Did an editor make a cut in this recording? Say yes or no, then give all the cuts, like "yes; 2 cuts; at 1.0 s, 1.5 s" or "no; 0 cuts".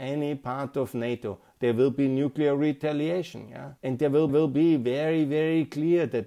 yes; 2 cuts; at 3.8 s, 4.3 s